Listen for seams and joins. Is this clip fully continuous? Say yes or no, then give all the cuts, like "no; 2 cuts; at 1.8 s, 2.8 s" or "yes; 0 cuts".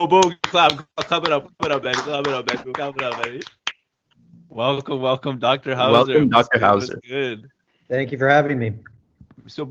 yes; 0 cuts